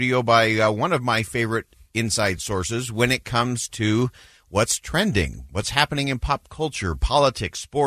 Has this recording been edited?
no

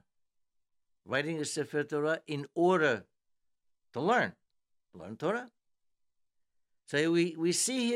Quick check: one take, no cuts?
yes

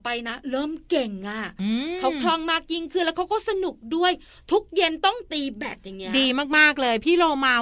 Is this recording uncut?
yes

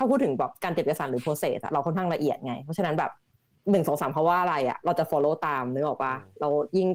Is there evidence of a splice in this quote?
no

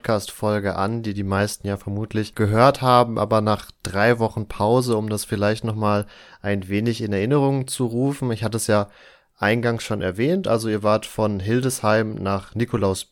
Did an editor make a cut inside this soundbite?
no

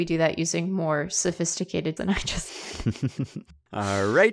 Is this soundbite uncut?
no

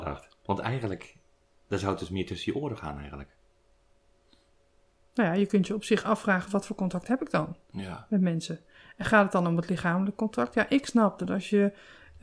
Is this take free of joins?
yes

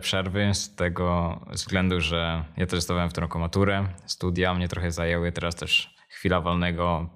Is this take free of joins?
yes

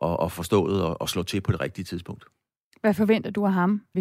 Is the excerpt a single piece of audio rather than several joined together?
yes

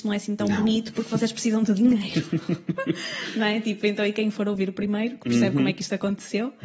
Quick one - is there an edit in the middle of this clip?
no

